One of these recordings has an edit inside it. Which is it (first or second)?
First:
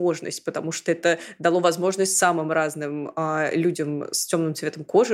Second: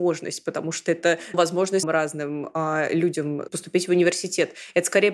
second